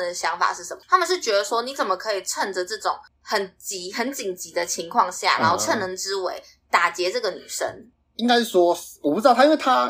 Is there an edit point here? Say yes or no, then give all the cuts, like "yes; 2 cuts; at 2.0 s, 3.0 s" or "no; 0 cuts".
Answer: no; 0 cuts